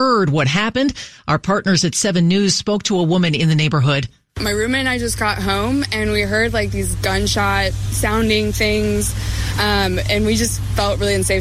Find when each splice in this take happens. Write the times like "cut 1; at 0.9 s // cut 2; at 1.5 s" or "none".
none